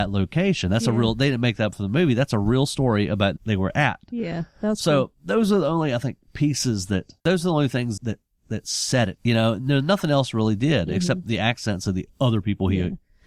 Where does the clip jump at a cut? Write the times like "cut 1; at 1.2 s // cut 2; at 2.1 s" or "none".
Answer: cut 1; at 3.4 s // cut 2; at 5.1 s // cut 3; at 7.2 s // cut 4; at 8.0 s